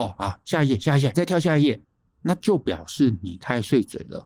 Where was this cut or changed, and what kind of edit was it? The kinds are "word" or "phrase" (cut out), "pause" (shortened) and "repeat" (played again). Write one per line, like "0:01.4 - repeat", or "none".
0:01.1 - phrase
0:01.8 - pause